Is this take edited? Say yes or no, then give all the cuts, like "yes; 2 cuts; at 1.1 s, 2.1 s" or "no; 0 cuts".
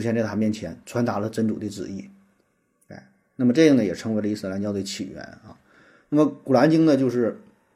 no; 0 cuts